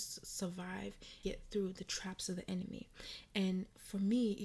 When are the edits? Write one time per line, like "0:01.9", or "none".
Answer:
0:01.2